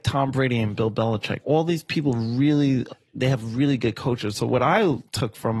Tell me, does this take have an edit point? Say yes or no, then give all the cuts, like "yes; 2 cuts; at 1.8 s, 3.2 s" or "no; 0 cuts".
no; 0 cuts